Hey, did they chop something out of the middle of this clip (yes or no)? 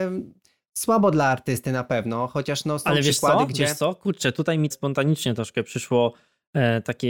yes